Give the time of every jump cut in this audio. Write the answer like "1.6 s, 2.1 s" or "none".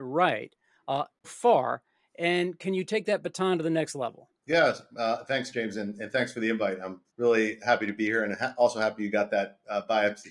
1.2 s, 7.1 s